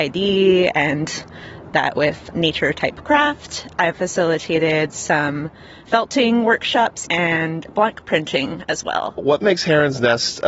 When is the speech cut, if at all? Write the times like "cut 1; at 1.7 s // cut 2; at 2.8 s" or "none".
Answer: cut 1; at 1.7 s // cut 2; at 2.3 s // cut 3; at 3.9 s